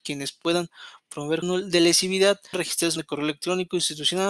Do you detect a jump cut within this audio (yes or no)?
yes